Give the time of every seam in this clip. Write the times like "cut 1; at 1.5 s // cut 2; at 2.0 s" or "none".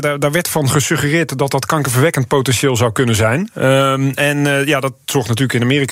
none